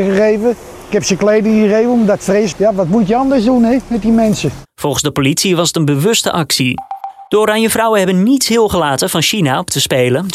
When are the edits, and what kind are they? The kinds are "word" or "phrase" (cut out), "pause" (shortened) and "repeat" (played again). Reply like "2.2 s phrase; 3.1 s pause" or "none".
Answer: 2.5 s word; 7.3 s pause